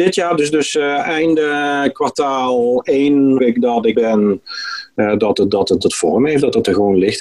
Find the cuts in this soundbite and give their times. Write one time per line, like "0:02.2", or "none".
0:03.4
0:03.9
0:05.8